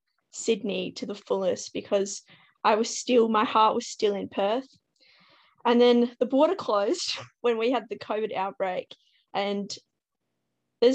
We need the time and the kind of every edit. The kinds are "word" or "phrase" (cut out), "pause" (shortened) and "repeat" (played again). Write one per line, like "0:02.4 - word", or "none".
none